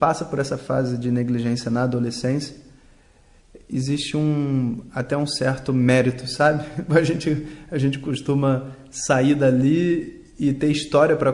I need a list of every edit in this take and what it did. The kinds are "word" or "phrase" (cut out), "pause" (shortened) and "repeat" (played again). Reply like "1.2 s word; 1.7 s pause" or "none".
none